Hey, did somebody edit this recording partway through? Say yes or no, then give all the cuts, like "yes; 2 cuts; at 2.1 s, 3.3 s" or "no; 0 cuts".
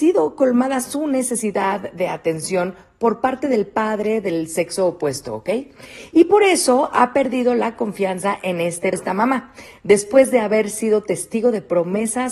yes; 1 cut; at 8.9 s